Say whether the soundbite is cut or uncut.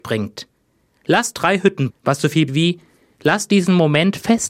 cut